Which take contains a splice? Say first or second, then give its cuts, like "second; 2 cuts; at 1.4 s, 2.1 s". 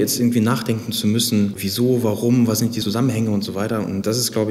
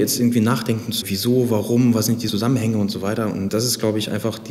second; 1 cut; at 1.0 s